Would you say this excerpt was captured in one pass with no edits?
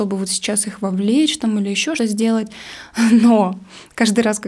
no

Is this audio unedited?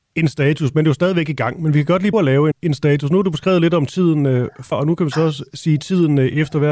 no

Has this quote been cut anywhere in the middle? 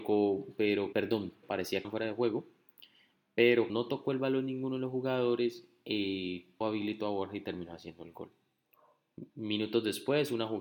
yes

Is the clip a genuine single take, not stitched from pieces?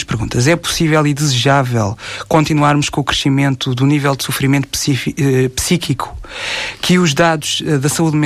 yes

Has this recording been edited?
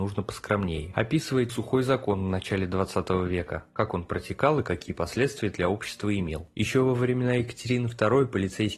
yes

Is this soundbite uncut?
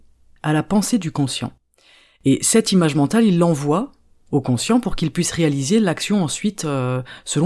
yes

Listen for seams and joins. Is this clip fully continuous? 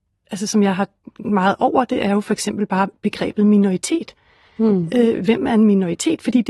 no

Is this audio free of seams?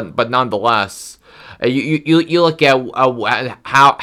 yes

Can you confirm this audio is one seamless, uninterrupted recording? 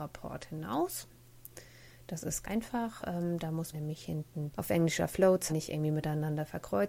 no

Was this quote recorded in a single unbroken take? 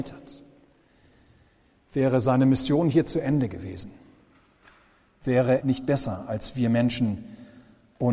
no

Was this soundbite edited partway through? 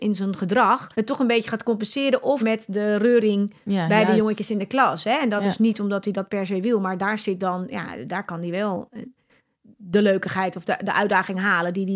yes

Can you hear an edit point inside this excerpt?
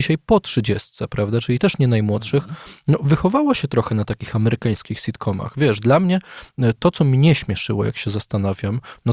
no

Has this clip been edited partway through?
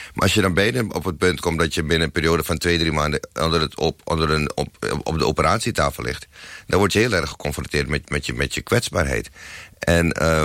no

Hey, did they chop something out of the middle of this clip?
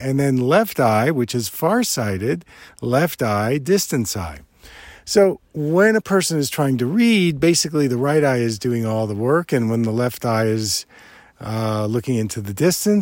no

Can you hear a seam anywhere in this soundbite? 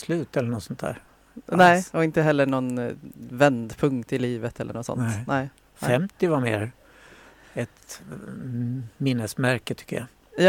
no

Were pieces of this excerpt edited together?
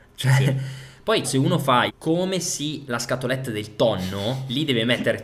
yes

